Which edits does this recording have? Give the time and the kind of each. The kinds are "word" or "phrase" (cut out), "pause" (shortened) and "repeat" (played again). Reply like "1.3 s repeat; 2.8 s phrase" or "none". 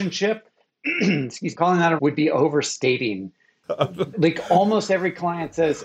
1.5 s word; 2.0 s word; 4.1 s word